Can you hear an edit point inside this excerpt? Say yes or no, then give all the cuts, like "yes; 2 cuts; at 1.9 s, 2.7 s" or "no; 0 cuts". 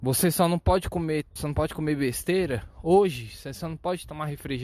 yes; 1 cut; at 1.4 s